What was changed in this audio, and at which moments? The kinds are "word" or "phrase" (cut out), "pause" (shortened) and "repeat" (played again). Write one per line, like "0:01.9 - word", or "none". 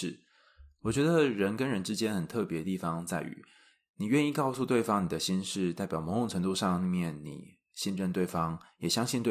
none